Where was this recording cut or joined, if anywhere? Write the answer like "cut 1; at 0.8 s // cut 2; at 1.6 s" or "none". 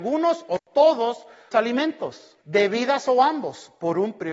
cut 1; at 1.5 s // cut 2; at 2.4 s

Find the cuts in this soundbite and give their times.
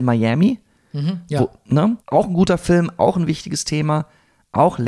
cut 1; at 2.0 s // cut 2; at 3.0 s

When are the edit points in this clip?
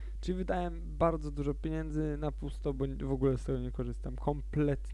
none

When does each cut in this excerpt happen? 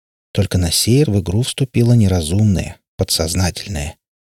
cut 1; at 1.0 s

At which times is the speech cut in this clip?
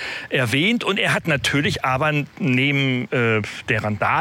none

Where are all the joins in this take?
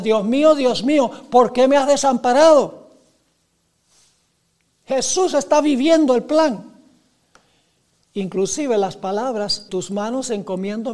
cut 1; at 9.7 s

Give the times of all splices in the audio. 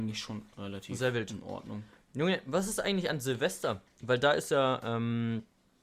none

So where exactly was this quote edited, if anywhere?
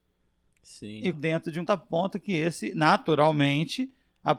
cut 1; at 1.1 s // cut 2; at 1.7 s

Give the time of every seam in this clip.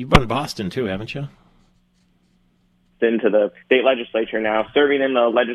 cut 1; at 3.6 s

